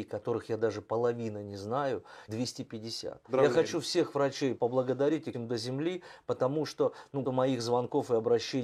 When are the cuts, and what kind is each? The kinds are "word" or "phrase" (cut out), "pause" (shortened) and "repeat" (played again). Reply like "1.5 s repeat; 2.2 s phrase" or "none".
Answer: 2.3 s word; 3.2 s pause; 4.6 s word; 5.3 s word; 7.2 s word